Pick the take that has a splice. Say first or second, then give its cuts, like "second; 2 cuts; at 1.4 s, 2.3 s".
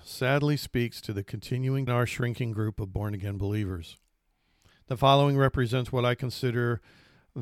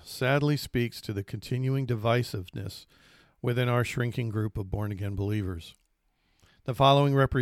first; 1 cut; at 1.9 s